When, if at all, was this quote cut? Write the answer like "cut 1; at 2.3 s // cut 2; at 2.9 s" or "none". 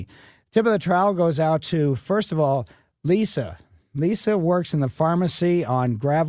none